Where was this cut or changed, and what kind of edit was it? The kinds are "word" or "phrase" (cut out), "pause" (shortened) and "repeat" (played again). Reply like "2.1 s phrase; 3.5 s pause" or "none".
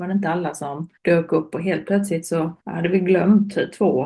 1.0 s pause; 2.6 s pause